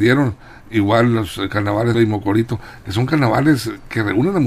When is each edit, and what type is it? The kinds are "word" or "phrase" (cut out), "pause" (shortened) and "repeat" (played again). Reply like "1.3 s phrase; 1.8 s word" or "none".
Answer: 1.9 s phrase